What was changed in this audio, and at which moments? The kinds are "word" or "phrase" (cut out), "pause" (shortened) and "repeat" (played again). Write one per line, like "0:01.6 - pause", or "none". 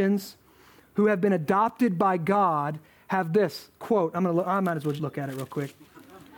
0:05.0 - word